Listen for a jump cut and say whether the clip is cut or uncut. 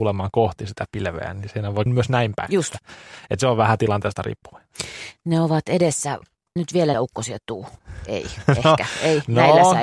cut